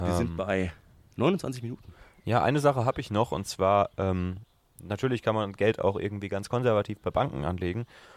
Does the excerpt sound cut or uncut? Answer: uncut